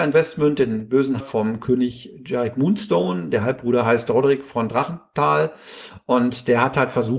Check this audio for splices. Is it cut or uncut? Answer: cut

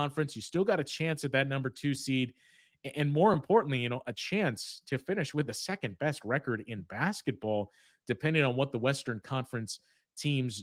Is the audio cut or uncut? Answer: uncut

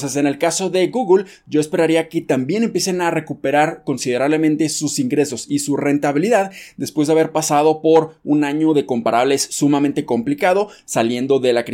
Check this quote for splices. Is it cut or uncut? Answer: uncut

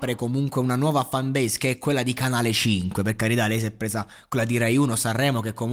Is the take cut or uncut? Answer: uncut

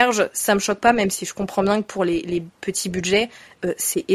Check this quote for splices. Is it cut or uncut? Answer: uncut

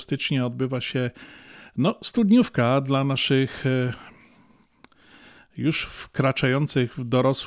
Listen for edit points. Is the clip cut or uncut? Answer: uncut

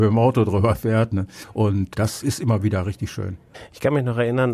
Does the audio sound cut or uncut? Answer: uncut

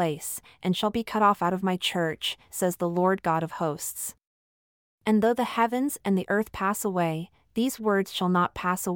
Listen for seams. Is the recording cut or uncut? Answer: uncut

